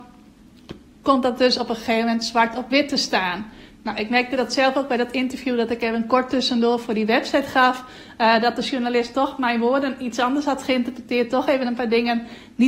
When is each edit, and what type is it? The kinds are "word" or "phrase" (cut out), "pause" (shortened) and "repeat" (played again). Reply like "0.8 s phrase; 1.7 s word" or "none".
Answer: none